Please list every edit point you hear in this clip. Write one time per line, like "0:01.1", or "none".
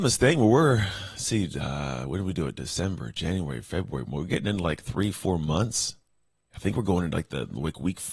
none